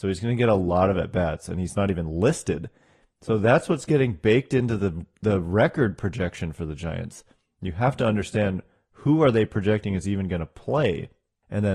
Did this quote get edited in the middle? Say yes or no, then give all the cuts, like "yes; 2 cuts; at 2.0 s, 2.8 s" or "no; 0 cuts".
no; 0 cuts